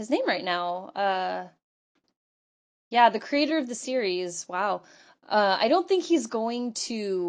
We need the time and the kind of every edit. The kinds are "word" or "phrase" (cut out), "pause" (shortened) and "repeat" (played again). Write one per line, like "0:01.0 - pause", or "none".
none